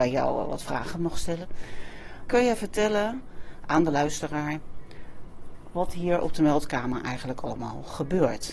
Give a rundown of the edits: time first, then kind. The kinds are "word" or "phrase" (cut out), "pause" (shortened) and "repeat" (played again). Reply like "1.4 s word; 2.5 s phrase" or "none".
none